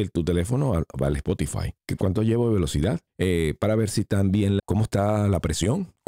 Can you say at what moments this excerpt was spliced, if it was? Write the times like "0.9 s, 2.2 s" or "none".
4.6 s